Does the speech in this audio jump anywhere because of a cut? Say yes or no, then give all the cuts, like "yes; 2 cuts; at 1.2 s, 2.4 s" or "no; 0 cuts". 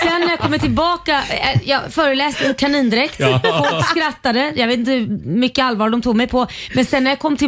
no; 0 cuts